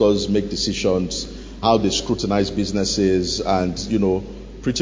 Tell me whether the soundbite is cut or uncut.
cut